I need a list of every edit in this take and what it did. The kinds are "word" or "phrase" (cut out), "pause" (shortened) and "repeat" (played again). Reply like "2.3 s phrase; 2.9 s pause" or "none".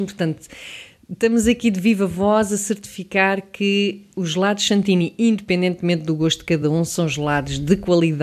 none